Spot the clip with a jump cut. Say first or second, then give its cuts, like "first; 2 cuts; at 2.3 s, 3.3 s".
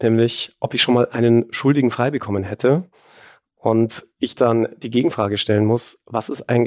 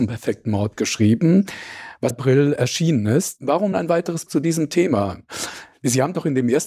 second; 3 cuts; at 2.1 s, 3.7 s, 4.3 s